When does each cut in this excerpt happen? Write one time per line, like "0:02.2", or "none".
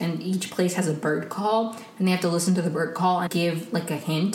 0:03.3